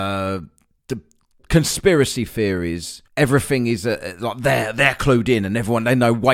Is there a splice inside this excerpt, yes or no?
yes